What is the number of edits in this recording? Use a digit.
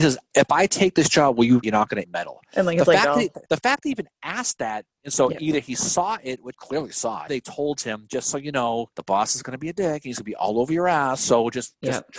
6